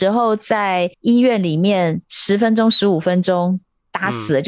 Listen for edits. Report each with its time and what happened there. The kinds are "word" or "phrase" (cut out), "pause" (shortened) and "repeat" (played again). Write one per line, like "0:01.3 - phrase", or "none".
0:00.9 - pause